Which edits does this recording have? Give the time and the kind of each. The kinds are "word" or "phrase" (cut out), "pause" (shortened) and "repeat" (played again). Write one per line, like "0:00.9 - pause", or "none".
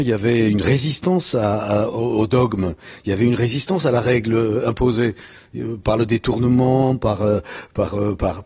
none